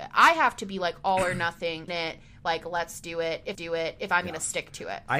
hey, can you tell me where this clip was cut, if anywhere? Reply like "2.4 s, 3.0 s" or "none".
1.9 s, 3.5 s